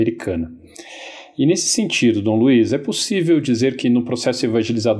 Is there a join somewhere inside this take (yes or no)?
no